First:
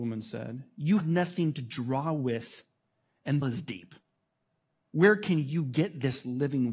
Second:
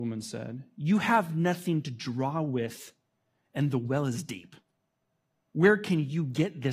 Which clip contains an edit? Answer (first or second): first